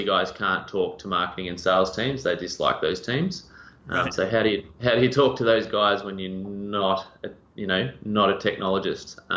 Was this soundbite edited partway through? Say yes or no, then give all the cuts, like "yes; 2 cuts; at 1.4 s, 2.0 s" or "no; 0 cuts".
no; 0 cuts